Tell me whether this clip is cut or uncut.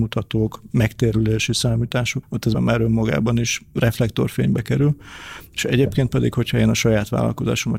cut